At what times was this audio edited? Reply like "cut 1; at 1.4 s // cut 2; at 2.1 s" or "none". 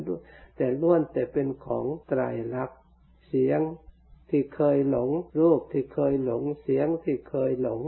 cut 1; at 2.0 s // cut 2; at 3.1 s // cut 3; at 4.2 s // cut 4; at 5.3 s